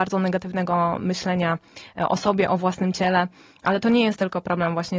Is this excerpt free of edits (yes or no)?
yes